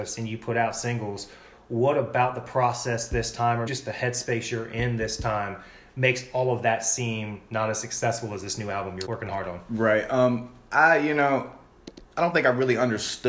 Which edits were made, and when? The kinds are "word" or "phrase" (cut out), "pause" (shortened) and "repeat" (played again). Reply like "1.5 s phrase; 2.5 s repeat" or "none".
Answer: 3.7 s word; 9.1 s word; 12.1 s pause